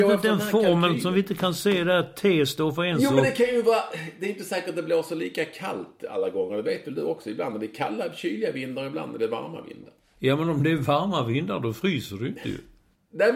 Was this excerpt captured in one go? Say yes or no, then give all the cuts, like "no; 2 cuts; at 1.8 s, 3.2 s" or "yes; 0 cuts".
yes; 0 cuts